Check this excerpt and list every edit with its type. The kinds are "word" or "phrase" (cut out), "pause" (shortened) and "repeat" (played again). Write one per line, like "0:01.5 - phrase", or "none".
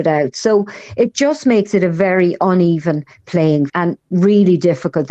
0:03.7 - word